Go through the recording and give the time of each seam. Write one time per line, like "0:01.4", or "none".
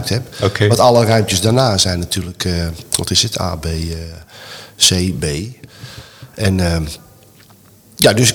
none